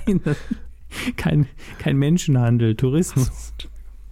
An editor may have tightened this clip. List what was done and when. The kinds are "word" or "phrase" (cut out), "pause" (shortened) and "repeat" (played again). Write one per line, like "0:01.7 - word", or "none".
none